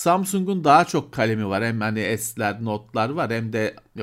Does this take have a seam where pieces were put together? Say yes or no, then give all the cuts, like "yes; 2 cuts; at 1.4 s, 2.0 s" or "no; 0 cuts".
no; 0 cuts